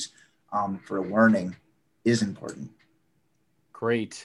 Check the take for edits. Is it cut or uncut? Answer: uncut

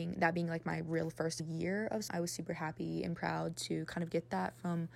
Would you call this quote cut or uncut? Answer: cut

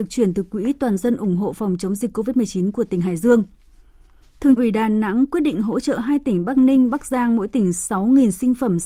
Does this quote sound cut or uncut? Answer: cut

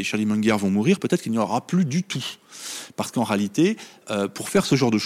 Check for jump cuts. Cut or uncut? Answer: uncut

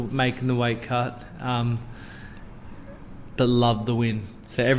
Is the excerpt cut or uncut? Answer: cut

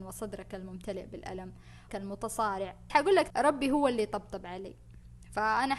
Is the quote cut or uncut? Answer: cut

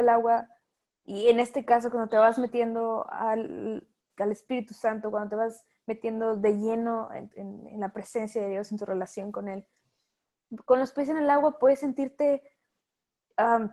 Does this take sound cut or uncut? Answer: uncut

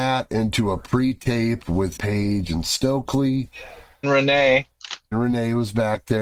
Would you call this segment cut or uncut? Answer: cut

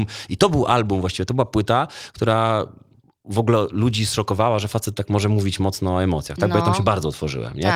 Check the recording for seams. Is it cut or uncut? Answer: uncut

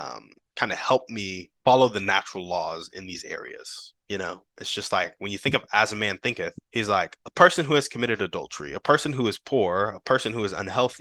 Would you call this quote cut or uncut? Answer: cut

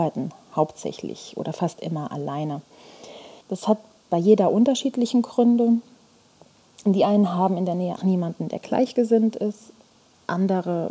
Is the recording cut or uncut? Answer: cut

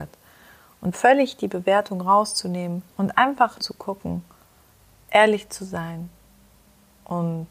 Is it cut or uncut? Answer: cut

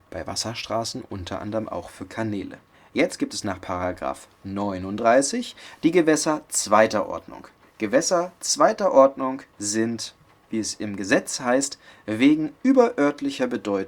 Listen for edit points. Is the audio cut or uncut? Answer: cut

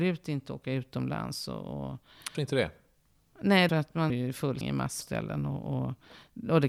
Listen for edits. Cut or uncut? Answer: cut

